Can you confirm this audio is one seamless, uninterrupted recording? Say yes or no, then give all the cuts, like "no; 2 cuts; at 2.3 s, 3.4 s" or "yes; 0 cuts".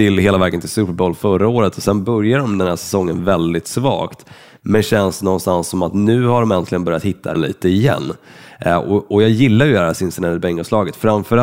no; 1 cut; at 7.3 s